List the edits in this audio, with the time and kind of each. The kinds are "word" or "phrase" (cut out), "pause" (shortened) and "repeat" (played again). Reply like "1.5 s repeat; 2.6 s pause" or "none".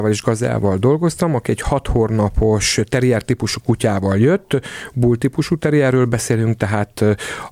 none